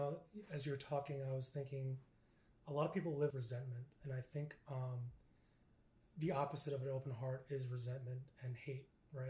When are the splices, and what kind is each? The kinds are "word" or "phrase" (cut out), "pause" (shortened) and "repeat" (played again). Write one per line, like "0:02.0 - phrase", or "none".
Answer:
0:03.3 - word